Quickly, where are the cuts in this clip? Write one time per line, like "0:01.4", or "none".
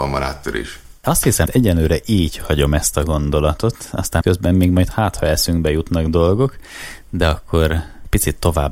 0:01.5
0:04.2